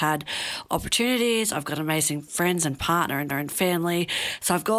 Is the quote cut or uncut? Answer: cut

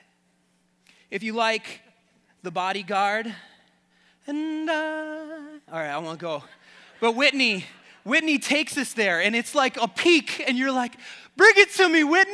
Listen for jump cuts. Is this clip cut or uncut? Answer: uncut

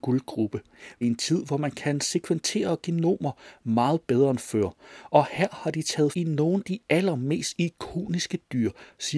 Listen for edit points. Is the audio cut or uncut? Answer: cut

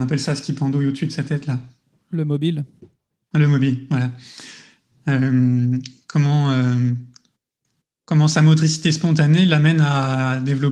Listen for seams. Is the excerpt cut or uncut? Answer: uncut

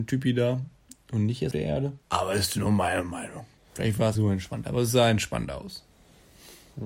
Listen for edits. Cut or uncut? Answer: cut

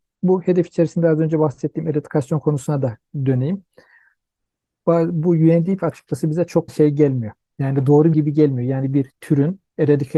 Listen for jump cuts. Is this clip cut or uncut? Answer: cut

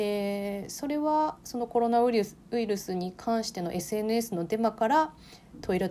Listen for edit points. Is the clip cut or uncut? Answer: uncut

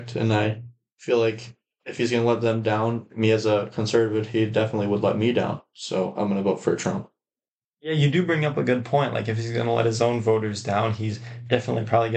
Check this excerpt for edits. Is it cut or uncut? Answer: uncut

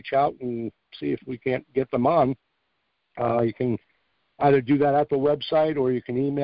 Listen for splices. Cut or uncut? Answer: uncut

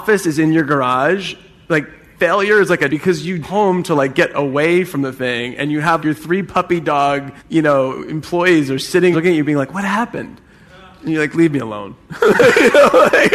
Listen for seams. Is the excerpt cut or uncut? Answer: cut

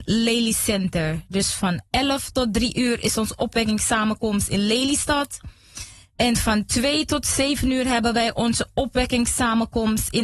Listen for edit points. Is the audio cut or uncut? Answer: uncut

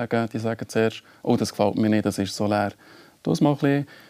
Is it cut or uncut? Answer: uncut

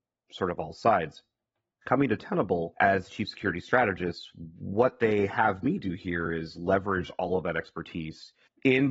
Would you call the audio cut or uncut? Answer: uncut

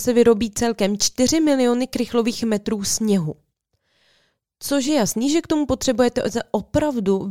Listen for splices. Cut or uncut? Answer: uncut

